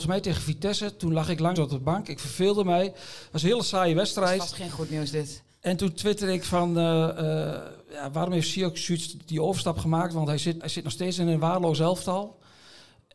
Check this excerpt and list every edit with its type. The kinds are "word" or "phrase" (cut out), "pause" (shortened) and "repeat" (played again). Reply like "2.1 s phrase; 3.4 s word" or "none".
1.5 s word; 7.8 s pause; 10.6 s word